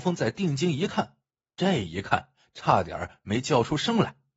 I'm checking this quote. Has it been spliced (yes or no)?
no